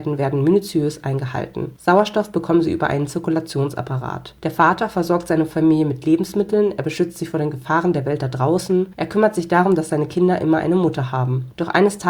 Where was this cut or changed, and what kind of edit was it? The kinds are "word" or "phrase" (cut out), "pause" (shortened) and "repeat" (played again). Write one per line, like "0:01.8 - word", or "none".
none